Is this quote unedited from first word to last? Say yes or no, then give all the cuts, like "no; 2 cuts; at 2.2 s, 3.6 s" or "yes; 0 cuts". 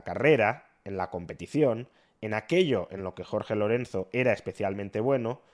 yes; 0 cuts